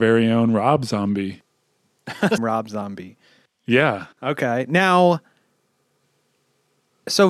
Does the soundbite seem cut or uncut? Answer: cut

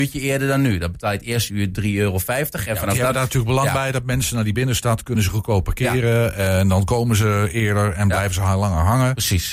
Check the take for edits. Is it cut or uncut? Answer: uncut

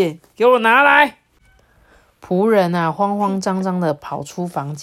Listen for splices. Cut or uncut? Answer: uncut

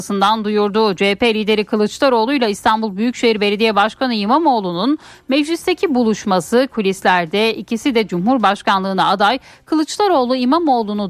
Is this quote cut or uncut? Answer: uncut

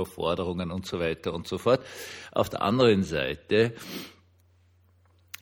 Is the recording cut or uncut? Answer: uncut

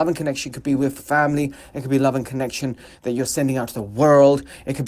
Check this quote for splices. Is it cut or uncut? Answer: cut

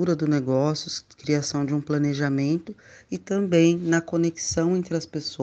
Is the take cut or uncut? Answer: uncut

